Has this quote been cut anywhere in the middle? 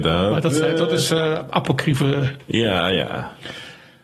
no; 0 cuts

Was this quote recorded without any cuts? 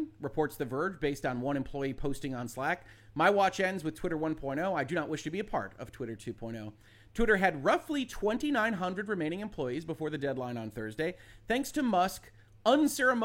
yes; 0 cuts

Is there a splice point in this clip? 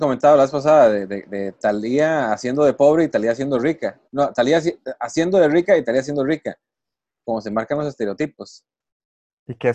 no; 0 cuts

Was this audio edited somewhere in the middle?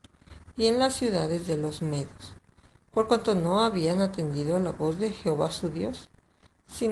no; 0 cuts

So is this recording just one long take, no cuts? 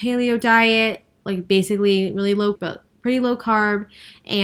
no; 1 cut; at 2.6 s

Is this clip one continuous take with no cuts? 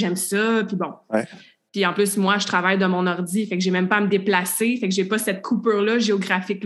yes; 0 cuts

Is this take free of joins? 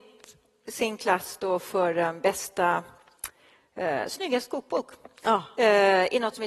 yes; 0 cuts

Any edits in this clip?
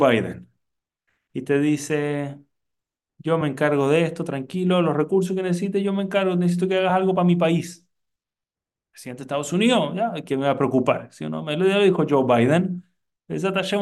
no; 0 cuts

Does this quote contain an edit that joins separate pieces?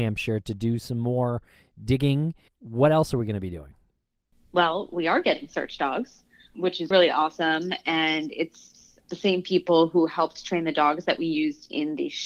yes; 3 cuts; at 2.5 s, 6.5 s, 6.9 s

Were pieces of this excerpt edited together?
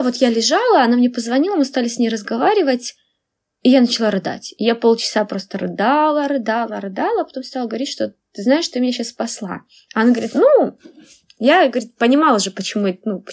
no; 0 cuts

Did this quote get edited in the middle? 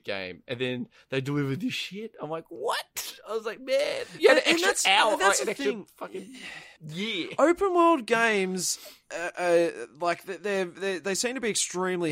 yes; 1 cut; at 6.8 s

